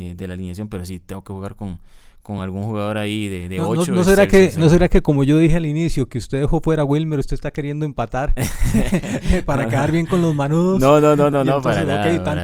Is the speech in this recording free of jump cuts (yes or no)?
yes